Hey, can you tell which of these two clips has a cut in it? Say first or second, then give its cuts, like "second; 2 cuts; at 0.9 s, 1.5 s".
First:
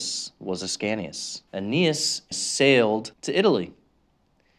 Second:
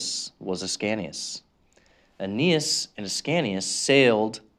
first; 3 cuts; at 1.5 s, 2.3 s, 3.1 s